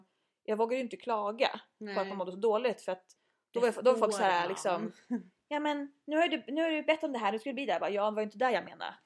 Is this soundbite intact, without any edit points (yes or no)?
yes